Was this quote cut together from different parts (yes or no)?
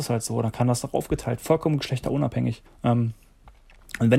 yes